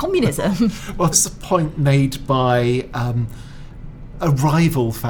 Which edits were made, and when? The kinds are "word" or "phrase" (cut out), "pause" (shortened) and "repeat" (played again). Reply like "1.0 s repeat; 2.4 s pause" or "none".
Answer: 1.1 s word; 4.1 s word